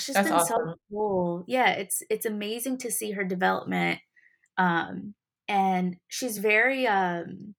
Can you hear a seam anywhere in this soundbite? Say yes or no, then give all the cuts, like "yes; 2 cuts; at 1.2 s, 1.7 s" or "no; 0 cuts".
no; 0 cuts